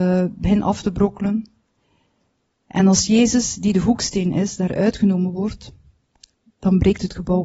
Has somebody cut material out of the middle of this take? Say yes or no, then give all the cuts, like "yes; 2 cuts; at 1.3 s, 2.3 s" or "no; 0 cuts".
no; 0 cuts